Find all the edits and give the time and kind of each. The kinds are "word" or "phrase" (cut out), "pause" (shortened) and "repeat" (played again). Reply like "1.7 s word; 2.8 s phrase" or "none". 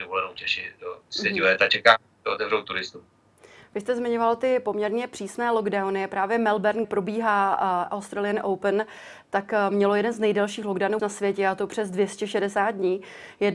6.8 s word; 11.0 s word